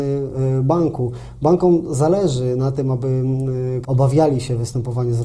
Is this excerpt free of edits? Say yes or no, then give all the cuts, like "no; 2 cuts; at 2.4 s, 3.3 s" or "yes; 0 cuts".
no; 1 cut; at 3.8 s